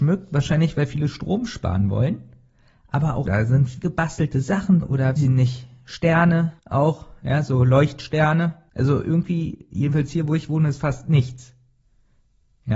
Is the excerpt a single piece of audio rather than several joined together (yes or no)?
no